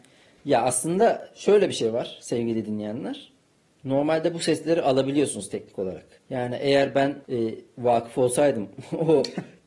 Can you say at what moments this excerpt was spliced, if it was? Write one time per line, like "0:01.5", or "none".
0:03.5
0:06.2
0:07.2

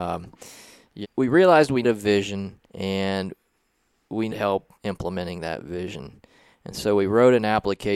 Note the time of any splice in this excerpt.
0:01.0
0:01.8
0:02.6
0:04.3
0:04.7

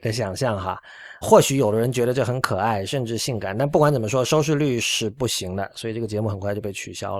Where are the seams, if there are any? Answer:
0:01.2

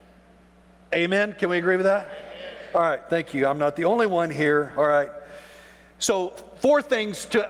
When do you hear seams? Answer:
none

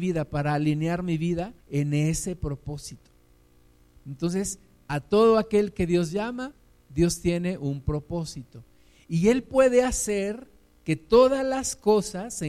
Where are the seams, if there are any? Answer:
0:01.6

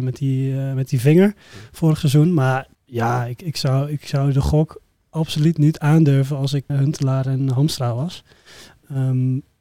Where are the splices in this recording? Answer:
0:02.7
0:06.7

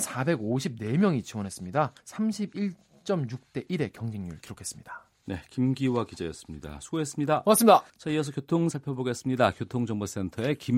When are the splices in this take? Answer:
0:02.0
0:07.9
0:08.7

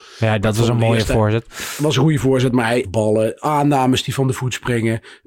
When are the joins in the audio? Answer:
0:02.8

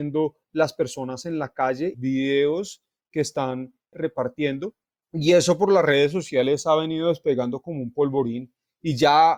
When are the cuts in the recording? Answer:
0:01.9

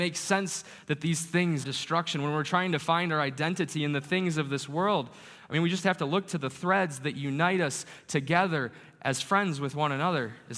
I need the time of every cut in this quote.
0:01.6

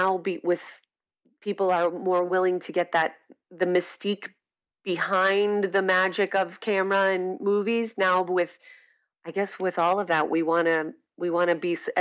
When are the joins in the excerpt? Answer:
none

